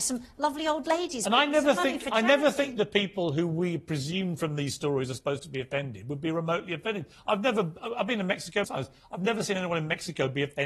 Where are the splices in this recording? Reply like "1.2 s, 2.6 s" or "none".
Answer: 8.6 s